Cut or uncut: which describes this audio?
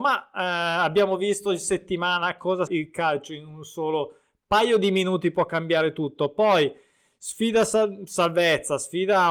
cut